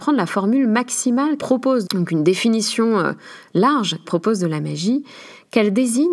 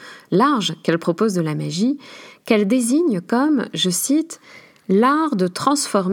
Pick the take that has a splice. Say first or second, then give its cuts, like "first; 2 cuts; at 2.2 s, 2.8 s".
first; 3 cuts; at 1.4 s, 1.8 s, 4.0 s